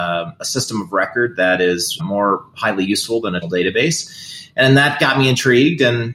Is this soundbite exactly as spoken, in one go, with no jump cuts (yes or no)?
no